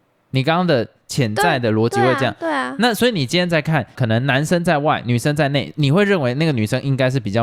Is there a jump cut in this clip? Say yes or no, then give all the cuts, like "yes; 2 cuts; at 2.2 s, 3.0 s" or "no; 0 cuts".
yes; 1 cut; at 3.9 s